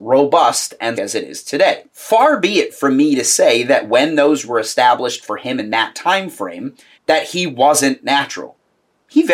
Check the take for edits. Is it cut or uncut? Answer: cut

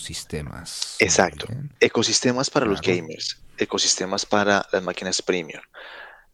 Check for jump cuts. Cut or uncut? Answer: cut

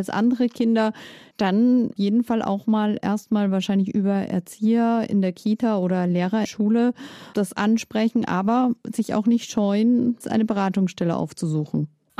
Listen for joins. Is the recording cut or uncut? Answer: cut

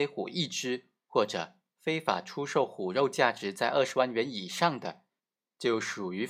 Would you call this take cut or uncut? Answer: cut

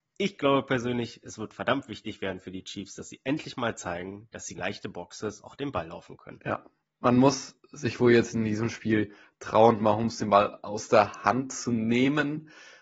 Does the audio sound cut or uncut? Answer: cut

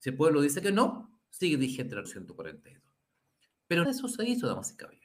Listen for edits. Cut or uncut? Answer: cut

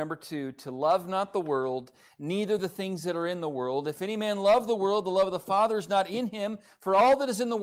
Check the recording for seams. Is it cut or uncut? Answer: uncut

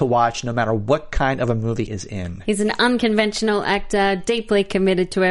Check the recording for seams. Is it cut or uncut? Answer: cut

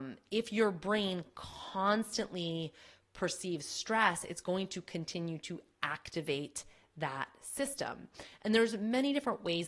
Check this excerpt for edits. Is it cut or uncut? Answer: uncut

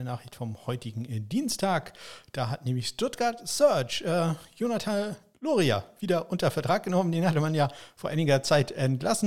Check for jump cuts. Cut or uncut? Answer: uncut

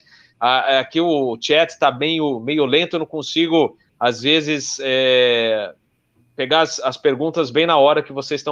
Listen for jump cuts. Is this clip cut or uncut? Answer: uncut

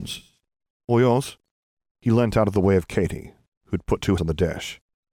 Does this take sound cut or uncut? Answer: cut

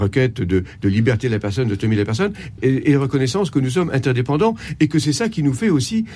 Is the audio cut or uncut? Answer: cut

